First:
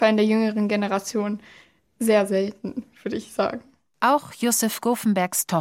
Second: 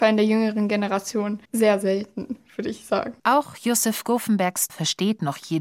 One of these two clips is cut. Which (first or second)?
second